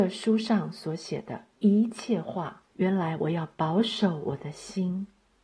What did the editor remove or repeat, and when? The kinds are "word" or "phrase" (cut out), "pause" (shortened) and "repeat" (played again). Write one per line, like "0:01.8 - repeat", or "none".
0:02.7 - pause